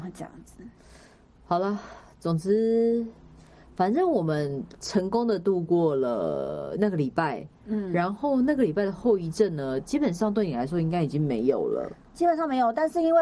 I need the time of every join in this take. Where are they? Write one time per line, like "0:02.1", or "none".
none